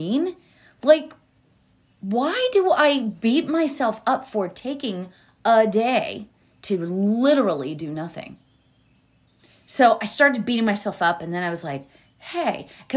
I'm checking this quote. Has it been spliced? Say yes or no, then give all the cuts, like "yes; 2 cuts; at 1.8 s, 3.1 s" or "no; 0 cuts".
no; 0 cuts